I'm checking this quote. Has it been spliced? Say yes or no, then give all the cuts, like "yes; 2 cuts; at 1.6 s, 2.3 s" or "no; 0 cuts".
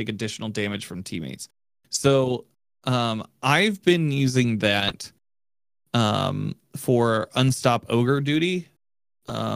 no; 0 cuts